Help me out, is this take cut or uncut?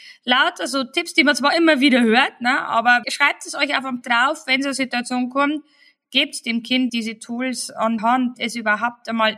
cut